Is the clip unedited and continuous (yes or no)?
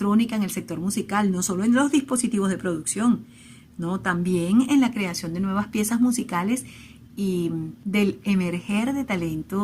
yes